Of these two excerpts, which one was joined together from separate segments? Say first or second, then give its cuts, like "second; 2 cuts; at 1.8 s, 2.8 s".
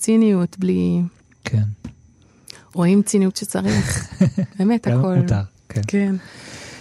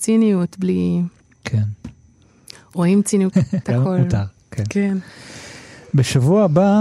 second; 2 cuts; at 3.3 s, 3.6 s